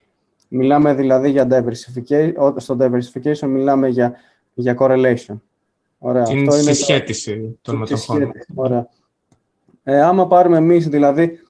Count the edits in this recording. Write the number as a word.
two